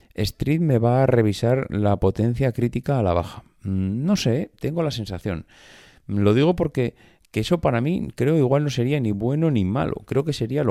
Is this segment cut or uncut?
uncut